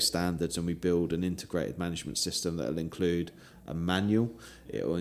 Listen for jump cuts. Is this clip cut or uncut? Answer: uncut